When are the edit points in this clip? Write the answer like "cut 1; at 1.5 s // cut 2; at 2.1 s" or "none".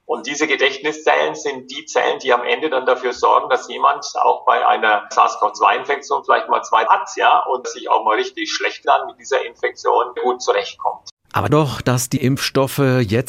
cut 1; at 6.9 s // cut 2; at 7.6 s // cut 3; at 8.8 s // cut 4; at 10.2 s // cut 5; at 11.5 s // cut 6; at 12.2 s